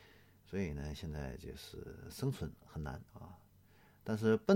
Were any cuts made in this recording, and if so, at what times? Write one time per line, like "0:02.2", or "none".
0:03.1